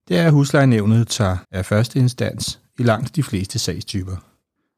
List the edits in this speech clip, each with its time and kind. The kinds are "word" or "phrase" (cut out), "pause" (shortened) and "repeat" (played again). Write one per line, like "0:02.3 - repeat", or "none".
0:01.4 - pause

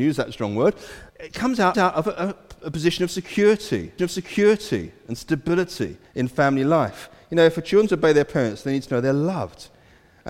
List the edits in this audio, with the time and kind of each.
0:01.1 - pause
0:01.7 - repeat
0:04.0 - repeat
0:06.1 - pause

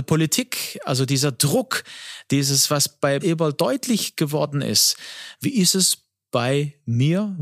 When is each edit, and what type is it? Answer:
0:03.2 - word

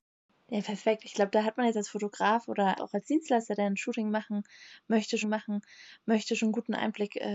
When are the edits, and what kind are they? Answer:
0:02.8 - word
0:05.2 - repeat

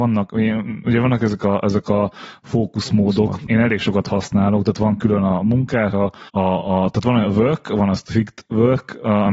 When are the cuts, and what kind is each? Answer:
0:03.5 - word
0:06.3 - pause

